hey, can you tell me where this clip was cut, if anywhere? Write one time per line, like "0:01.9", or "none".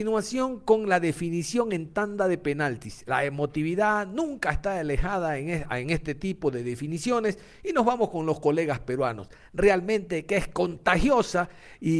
none